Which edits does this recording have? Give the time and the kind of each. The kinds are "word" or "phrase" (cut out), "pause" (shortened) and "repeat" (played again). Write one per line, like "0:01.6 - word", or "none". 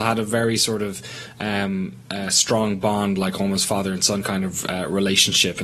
none